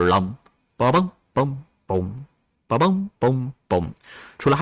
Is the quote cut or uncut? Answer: uncut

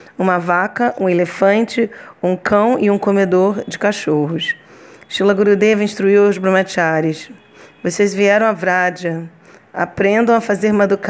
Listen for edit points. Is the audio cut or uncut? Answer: uncut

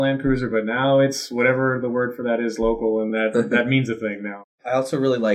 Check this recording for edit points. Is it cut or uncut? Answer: uncut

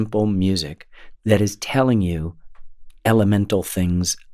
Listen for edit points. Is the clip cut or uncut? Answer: uncut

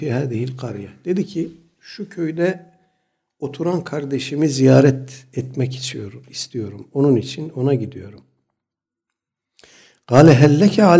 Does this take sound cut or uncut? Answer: uncut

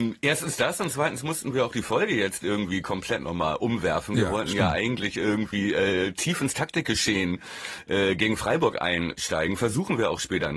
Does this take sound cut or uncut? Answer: uncut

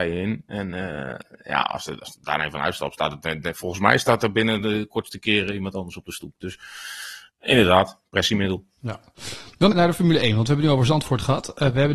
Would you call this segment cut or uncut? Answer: cut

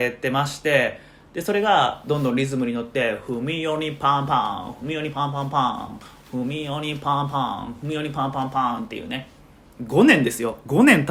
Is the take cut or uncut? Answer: uncut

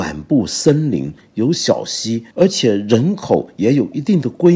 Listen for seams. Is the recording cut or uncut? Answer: cut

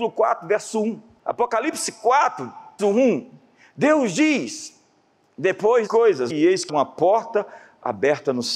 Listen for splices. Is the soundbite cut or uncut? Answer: cut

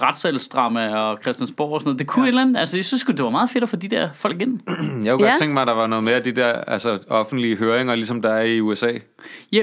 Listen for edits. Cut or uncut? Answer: uncut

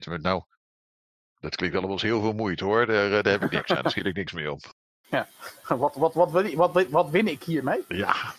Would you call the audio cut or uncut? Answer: uncut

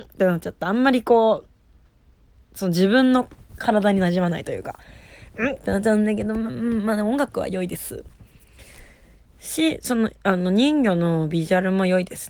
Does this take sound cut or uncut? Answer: uncut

